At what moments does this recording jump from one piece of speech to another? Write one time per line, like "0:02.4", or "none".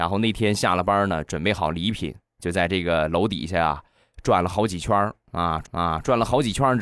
0:05.6